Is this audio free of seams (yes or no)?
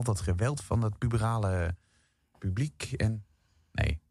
yes